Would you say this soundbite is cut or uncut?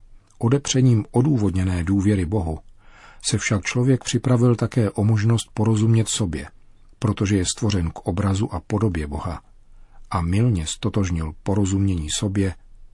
uncut